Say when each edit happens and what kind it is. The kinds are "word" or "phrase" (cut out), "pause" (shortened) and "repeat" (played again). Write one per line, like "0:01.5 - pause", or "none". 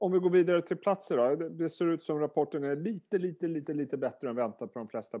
none